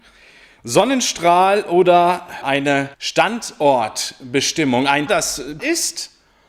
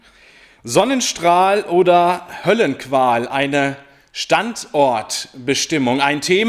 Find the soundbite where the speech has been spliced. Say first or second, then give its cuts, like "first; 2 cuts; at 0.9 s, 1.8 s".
first; 4 cuts; at 2.4 s, 2.9 s, 5.1 s, 5.6 s